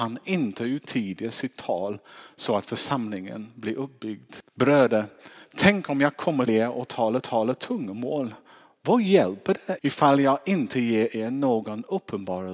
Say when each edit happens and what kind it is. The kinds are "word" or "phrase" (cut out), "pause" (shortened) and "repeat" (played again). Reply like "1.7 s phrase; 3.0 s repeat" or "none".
4.5 s pause; 6.5 s word; 7.2 s repeat; 9.8 s word